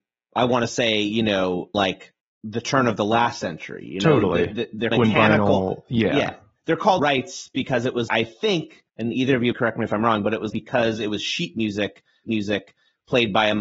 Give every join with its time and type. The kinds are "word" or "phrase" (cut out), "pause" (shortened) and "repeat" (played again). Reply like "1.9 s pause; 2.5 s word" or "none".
1.7 s word; 2.2 s pause; 4.9 s word; 7.0 s word; 8.1 s word; 8.9 s pause; 9.5 s word; 10.5 s word; 12.3 s repeat